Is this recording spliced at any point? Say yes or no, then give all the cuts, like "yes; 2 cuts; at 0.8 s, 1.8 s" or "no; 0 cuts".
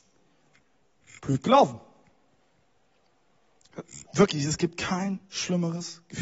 no; 0 cuts